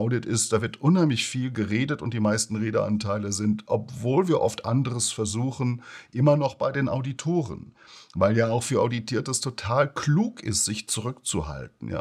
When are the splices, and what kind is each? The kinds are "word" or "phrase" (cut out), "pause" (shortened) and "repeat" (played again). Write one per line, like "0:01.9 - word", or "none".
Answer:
none